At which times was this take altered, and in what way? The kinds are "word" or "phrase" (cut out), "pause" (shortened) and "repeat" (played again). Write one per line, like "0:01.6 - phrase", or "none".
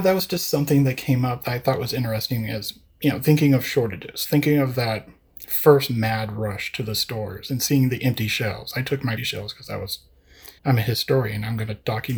0:09.2 - phrase
0:10.6 - pause